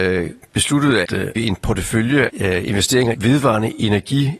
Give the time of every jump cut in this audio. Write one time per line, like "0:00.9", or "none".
0:01.0
0:01.4
0:02.3
0:03.1

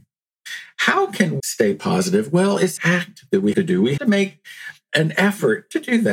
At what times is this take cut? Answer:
0:01.4
0:02.8
0:03.5
0:04.0
0:04.9

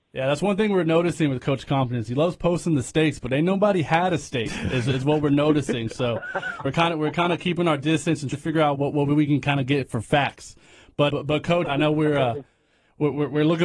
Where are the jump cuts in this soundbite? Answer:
0:06.7
0:08.3
0:08.8
0:11.1
0:11.7

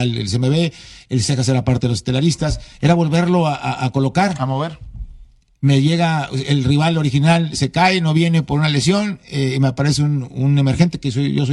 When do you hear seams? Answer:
none

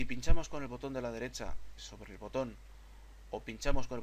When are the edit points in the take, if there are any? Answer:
0:01.8

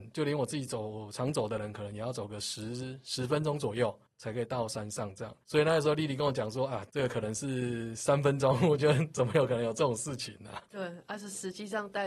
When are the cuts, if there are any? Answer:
0:05.4

